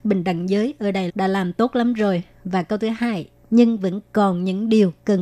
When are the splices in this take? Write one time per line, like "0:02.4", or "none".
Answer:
0:01.1